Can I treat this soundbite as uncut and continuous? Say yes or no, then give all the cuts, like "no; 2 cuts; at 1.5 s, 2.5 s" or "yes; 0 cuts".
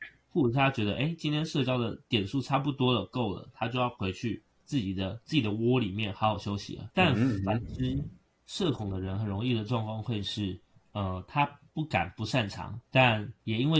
yes; 0 cuts